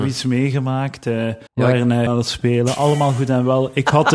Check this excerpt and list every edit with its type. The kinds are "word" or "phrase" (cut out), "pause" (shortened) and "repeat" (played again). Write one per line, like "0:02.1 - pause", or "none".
0:01.5 - pause
0:02.1 - phrase